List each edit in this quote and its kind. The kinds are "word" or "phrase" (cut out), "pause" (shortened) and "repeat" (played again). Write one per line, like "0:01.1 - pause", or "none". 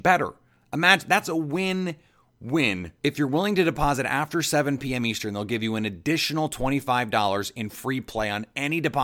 0:03.0 - pause